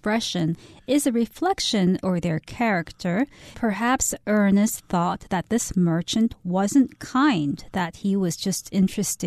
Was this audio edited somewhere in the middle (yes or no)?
yes